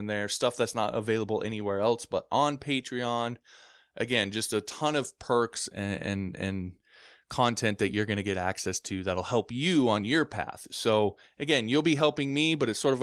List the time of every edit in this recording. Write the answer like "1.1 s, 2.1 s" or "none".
none